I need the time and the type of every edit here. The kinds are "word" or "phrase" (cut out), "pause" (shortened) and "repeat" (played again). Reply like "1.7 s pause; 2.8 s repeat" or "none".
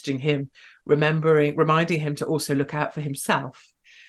none